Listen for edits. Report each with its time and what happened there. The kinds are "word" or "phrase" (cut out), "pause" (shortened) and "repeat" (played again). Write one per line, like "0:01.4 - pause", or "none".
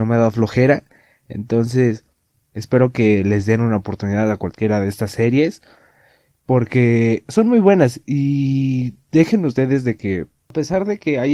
none